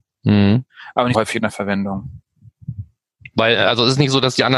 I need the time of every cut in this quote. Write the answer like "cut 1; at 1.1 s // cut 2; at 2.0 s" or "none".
cut 1; at 1.1 s